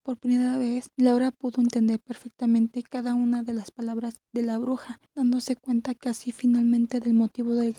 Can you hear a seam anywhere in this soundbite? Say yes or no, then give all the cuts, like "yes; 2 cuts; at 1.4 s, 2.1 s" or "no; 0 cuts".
yes; 3 cuts; at 0.9 s, 4.3 s, 5.1 s